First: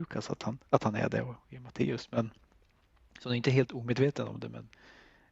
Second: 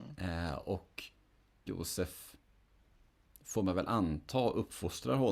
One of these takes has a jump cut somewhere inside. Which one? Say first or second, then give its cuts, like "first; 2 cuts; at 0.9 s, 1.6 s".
second; 1 cut; at 1.7 s